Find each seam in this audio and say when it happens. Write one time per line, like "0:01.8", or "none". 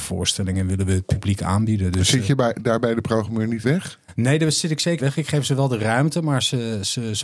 0:03.6
0:05.0